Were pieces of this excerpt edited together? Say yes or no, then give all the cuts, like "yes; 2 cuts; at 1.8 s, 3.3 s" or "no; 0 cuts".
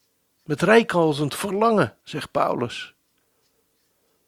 yes; 1 cut; at 2.0 s